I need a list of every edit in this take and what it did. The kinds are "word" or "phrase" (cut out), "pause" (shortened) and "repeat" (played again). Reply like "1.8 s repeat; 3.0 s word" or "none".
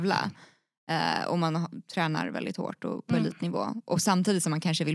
none